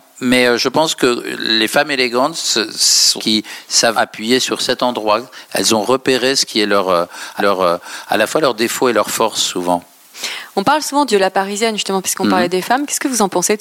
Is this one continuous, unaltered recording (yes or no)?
no